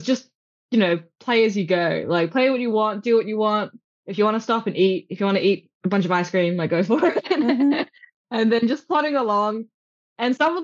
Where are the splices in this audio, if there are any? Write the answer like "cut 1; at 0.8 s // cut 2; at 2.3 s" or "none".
none